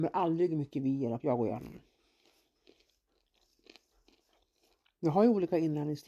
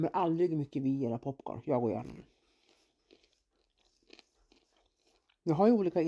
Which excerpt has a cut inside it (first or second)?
first